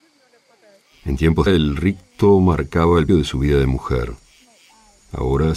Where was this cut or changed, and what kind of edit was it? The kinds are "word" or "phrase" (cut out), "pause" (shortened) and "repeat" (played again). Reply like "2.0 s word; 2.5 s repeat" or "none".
1.5 s phrase; 3.1 s word